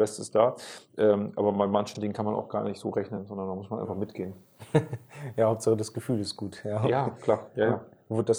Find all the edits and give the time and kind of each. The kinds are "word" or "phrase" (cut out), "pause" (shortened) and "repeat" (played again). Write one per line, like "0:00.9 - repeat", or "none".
none